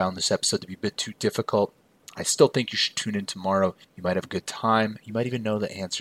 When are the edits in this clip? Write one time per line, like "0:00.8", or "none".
0:03.8